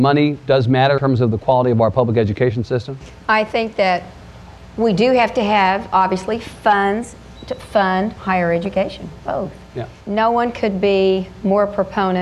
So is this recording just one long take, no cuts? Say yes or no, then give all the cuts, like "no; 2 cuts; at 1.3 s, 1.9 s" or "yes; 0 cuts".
no; 3 cuts; at 1.0 s, 8.2 s, 10.0 s